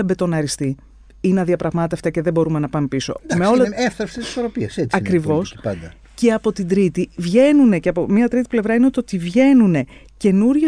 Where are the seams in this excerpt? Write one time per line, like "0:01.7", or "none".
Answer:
none